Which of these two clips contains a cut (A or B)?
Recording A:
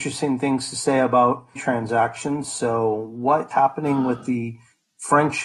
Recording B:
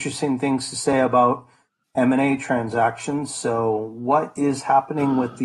A